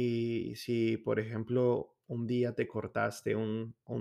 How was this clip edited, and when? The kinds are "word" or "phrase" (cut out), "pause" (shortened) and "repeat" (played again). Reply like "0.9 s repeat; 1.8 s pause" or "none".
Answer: none

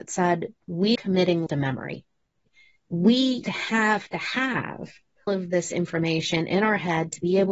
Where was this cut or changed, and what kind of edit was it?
0.9 s word; 1.5 s word; 3.4 s word; 5.3 s word

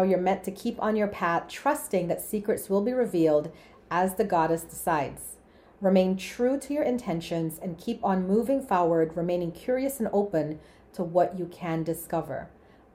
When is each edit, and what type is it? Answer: none

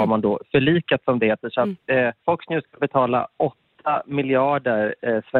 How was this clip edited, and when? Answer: 2.2 s pause

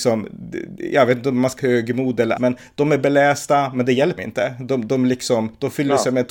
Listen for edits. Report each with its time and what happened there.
1.6 s word; 2.4 s word; 4.2 s word

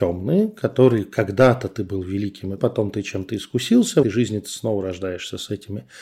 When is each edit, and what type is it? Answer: 2.6 s word; 4.0 s word

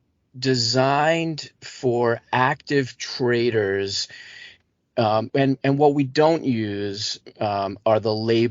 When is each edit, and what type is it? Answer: 5.3 s word

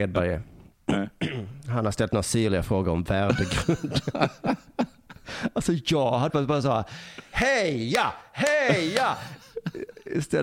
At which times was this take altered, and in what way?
6.3 s word

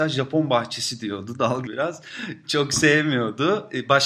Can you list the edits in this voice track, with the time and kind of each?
1.6 s word

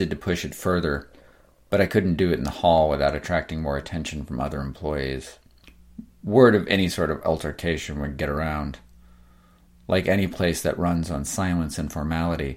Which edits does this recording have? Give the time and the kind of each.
none

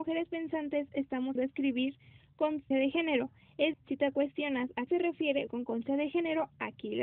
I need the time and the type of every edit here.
1.4 s word; 2.7 s word; 3.7 s word; 4.9 s word; 5.5 s word

